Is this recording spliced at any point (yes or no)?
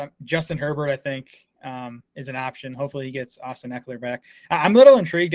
no